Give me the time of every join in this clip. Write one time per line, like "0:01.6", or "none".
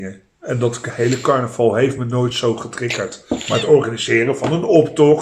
none